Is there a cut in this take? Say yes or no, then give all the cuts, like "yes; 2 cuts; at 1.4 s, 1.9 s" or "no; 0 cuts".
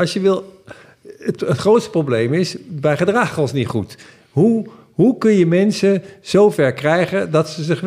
no; 0 cuts